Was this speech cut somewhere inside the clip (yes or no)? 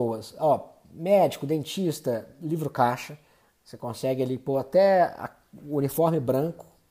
no